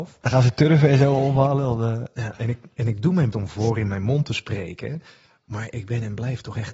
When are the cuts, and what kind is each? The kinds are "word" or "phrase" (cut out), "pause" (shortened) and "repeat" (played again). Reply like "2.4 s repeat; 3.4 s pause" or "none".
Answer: 3.3 s word